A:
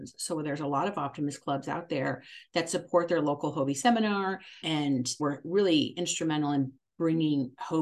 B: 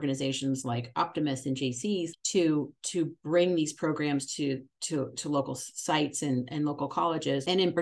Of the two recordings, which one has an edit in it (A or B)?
A